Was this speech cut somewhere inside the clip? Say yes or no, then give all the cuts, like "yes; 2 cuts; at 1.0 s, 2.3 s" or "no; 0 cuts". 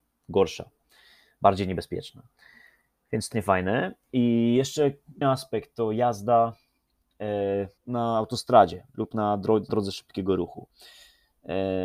yes; 4 cuts; at 3.3 s, 5.2 s, 7.8 s, 9.7 s